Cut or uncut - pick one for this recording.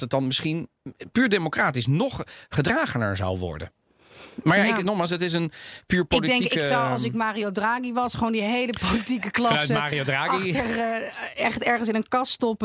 uncut